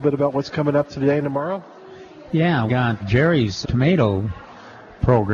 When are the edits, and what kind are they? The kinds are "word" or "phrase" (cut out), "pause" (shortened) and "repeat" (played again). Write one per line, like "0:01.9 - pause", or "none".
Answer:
0:00.9 - word
0:02.7 - word
0:03.0 - word
0:03.6 - word

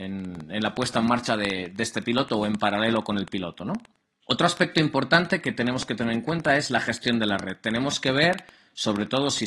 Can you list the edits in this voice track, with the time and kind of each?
none

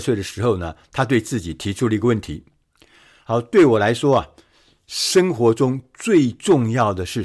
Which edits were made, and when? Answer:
none

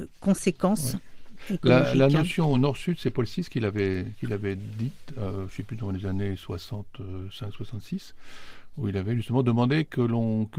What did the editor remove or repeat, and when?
none

